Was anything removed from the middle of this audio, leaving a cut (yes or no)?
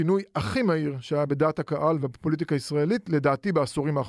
no